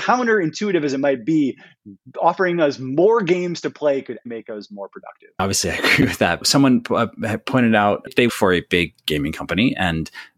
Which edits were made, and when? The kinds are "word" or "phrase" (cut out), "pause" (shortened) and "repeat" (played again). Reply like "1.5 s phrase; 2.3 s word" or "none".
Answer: 4.3 s word; 8.3 s word